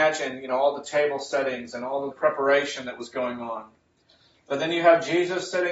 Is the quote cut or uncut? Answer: cut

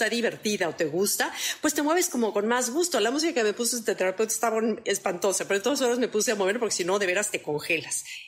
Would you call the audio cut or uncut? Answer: uncut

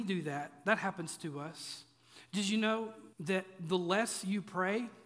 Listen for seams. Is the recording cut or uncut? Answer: cut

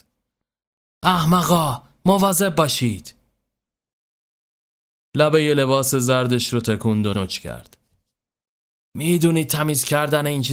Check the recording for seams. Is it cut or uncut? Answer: cut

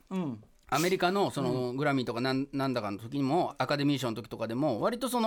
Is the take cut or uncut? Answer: cut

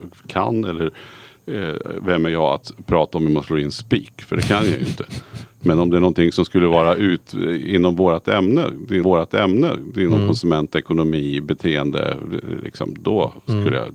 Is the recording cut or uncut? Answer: cut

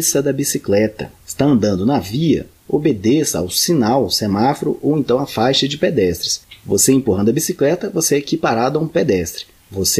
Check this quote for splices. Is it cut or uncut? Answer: uncut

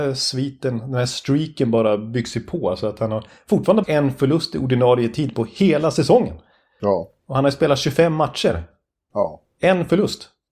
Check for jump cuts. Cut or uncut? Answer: cut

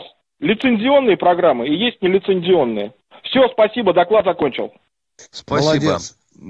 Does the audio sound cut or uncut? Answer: uncut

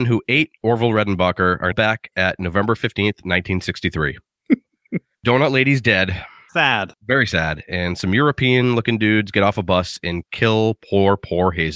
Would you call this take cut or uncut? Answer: cut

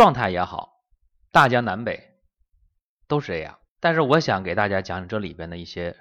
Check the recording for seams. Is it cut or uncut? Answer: cut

